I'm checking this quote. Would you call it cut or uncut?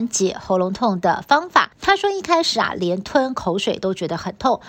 cut